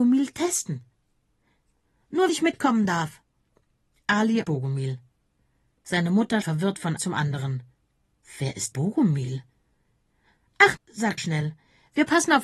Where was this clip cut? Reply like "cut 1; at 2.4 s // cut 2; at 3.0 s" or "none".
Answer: cut 1; at 2.3 s // cut 2; at 4.4 s // cut 3; at 6.4 s // cut 4; at 7.0 s // cut 5; at 8.7 s // cut 6; at 10.8 s // cut 7; at 11.2 s